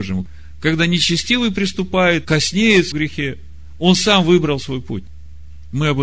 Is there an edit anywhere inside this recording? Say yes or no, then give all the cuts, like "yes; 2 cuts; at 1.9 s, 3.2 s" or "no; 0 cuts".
yes; 2 cuts; at 2.2 s, 2.9 s